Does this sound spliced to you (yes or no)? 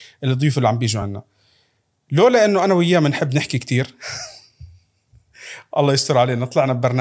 no